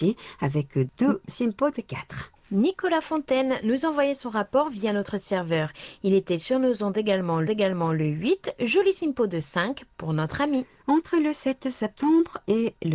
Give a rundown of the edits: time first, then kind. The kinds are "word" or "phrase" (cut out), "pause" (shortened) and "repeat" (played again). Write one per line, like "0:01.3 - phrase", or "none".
0:07.5 - repeat